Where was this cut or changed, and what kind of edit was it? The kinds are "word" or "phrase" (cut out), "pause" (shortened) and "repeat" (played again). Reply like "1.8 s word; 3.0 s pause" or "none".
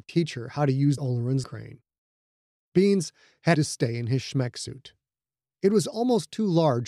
1.0 s word; 1.4 s word; 3.5 s word